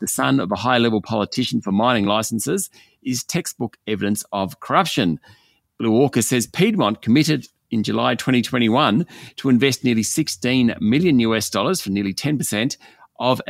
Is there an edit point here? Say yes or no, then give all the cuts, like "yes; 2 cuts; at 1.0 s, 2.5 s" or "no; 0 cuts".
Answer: no; 0 cuts